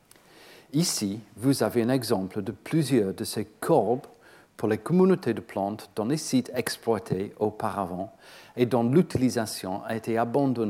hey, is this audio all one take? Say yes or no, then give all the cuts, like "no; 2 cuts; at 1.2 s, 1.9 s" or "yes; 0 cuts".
yes; 0 cuts